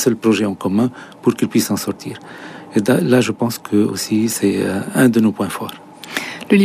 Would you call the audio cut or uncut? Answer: uncut